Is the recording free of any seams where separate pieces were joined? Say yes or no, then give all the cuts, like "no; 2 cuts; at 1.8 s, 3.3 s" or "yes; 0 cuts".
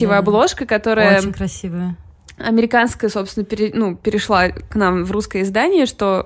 yes; 0 cuts